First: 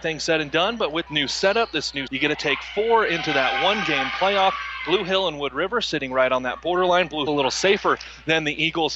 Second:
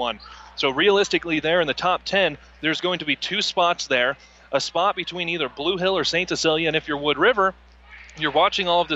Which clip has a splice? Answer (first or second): first